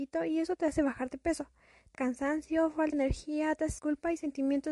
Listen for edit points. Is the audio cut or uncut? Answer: cut